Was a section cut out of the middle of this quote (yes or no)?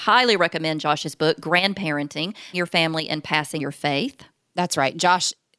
yes